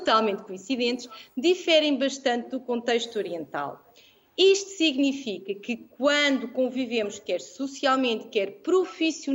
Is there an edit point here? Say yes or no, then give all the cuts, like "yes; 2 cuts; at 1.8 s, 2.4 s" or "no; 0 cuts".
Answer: no; 0 cuts